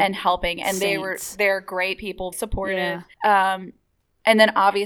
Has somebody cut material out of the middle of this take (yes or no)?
yes